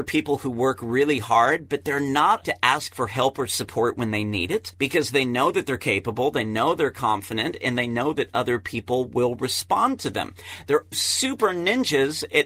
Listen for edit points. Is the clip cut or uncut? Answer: cut